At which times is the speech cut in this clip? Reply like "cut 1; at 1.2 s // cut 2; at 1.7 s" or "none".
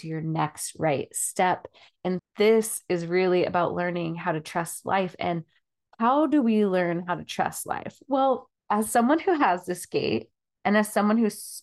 cut 1; at 2.2 s // cut 2; at 8.6 s